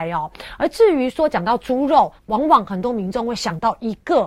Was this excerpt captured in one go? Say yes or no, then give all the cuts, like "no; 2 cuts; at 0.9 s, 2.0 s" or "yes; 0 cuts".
no; 1 cut; at 2.2 s